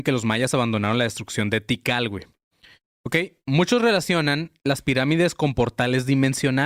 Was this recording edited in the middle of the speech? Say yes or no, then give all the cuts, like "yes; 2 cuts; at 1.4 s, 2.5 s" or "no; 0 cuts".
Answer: no; 0 cuts